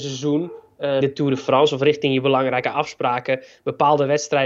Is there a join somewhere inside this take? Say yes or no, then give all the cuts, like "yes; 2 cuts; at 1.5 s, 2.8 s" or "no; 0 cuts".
yes; 1 cut; at 1.0 s